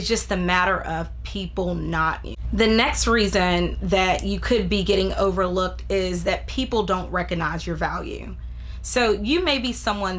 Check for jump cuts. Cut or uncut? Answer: cut